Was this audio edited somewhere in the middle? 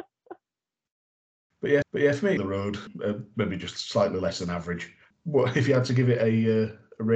yes; 3 cuts; at 1.8 s, 2.4 s, 5.0 s

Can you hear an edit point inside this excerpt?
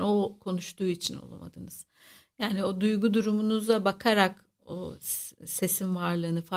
no; 0 cuts

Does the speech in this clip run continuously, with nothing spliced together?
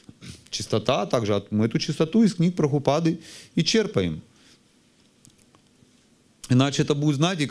yes; 0 cuts

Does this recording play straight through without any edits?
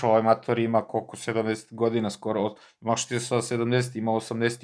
yes; 0 cuts

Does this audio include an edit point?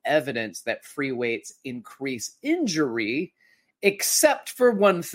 no; 0 cuts

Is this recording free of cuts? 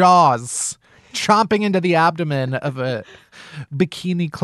yes; 0 cuts

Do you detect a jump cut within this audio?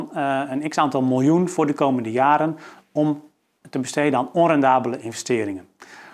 no; 0 cuts

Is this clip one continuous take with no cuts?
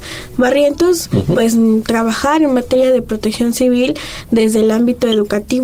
yes; 0 cuts

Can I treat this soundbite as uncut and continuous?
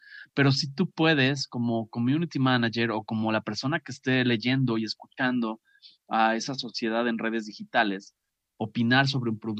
yes; 0 cuts

